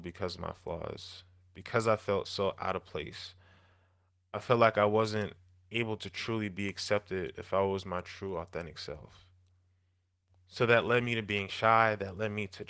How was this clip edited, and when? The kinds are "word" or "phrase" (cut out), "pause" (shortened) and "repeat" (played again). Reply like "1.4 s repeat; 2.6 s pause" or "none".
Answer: none